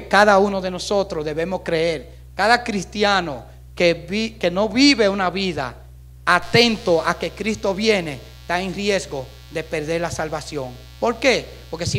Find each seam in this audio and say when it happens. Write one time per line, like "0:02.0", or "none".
none